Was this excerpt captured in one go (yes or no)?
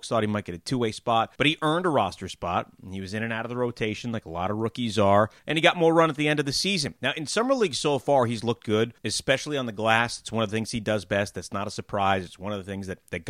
no